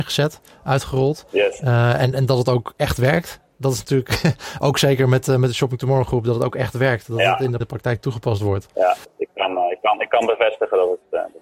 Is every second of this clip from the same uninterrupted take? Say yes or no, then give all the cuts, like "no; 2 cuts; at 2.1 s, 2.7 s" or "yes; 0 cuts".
no; 2 cuts; at 2.1 s, 7.6 s